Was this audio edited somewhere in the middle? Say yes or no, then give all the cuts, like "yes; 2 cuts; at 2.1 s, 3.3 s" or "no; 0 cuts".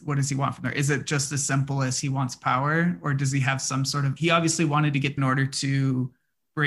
yes; 2 cuts; at 4.2 s, 5.2 s